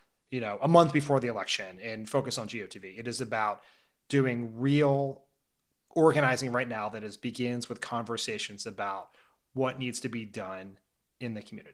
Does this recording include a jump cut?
no; 0 cuts

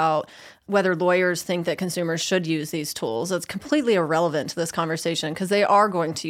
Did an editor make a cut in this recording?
no; 0 cuts

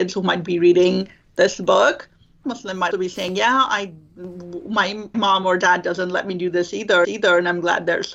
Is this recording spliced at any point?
yes; 4 cuts; at 2.4 s, 2.9 s, 5.1 s, 7.0 s

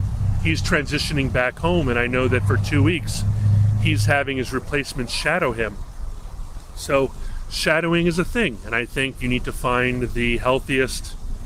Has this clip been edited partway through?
no; 0 cuts

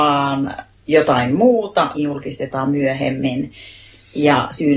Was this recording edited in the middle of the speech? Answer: yes; 1 cut; at 1.9 s

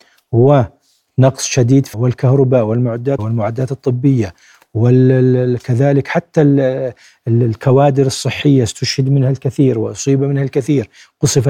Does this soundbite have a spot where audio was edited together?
yes; 2 cuts; at 1.9 s, 3.2 s

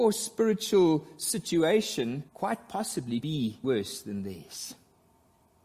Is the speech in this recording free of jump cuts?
no; 3 cuts; at 2.3 s, 3.2 s, 3.6 s

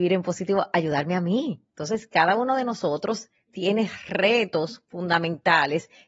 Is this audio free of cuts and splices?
no; 1 cut; at 1.7 s

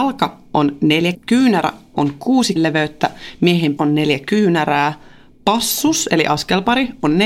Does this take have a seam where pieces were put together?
yes; 3 cuts; at 1.1 s, 2.6 s, 3.8 s

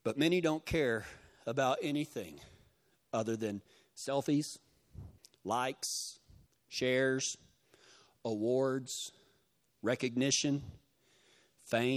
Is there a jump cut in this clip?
no; 0 cuts

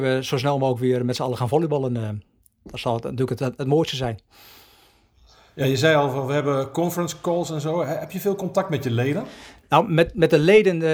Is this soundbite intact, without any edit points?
yes; 0 cuts

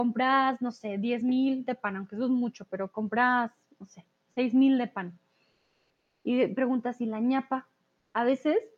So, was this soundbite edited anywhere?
no; 0 cuts

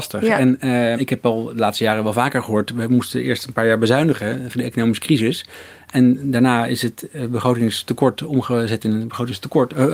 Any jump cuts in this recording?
yes; 2 cuts; at 0.9 s, 4.5 s

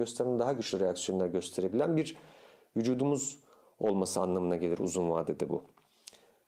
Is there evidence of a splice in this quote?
no; 0 cuts

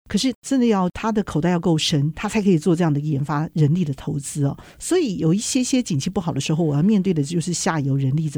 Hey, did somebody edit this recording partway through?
yes; 1 cut; at 4.7 s

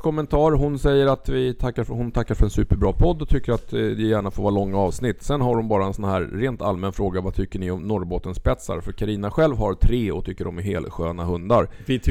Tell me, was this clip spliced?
no; 0 cuts

